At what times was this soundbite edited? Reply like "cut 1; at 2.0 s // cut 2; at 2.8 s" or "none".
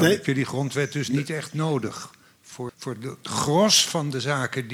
cut 1; at 2.7 s